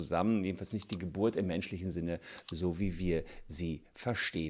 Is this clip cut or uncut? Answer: uncut